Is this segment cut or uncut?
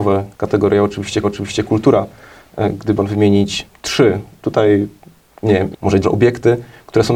cut